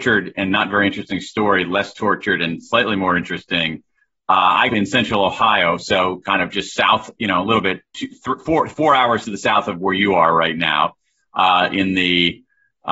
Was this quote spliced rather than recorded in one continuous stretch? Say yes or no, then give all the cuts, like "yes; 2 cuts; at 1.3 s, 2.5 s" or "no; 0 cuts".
yes; 1 cut; at 4.7 s